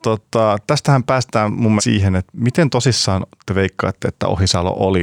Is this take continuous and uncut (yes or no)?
no